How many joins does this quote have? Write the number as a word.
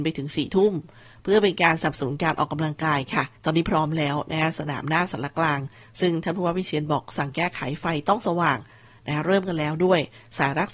one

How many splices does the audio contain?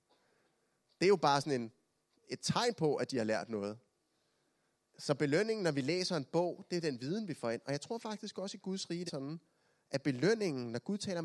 one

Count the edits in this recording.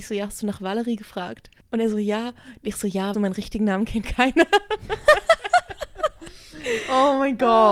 three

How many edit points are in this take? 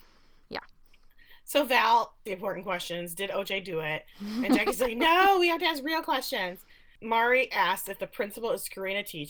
one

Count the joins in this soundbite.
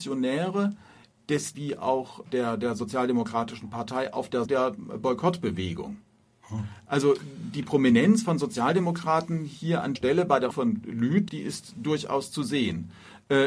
six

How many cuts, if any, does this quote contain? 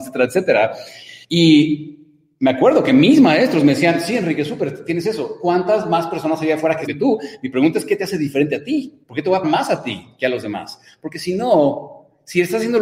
four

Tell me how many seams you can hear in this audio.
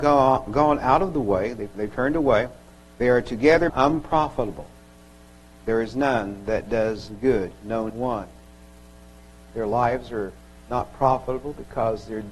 three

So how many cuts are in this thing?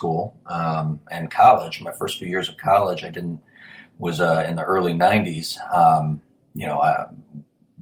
zero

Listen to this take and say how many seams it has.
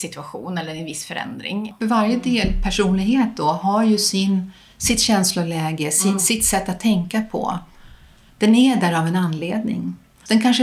zero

